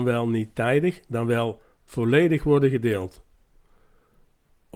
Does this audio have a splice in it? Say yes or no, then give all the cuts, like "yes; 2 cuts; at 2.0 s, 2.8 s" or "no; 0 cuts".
no; 0 cuts